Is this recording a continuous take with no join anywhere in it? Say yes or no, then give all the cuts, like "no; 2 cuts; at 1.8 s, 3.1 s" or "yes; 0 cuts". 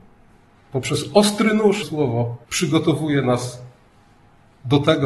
no; 2 cuts; at 1.8 s, 2.4 s